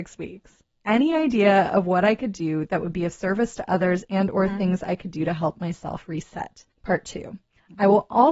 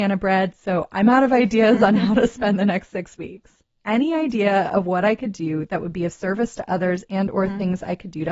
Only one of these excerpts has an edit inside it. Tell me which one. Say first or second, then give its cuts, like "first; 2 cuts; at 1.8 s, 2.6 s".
first; 1 cut; at 6.7 s